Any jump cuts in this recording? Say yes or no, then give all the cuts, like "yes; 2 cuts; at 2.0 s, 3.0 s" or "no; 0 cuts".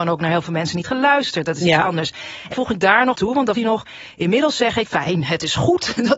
yes; 4 cuts; at 2.5 s, 3.1 s, 3.5 s, 4.8 s